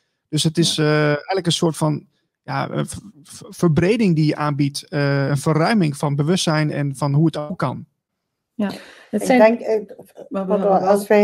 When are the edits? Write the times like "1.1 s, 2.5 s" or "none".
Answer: none